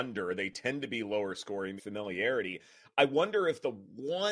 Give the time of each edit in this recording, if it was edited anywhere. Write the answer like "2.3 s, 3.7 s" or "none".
1.8 s